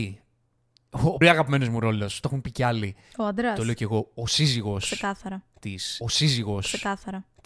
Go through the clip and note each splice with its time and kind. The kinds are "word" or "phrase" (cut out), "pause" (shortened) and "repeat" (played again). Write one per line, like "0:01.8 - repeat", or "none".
0:01.2 - word
0:06.0 - repeat